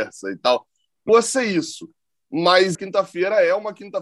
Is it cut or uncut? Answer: cut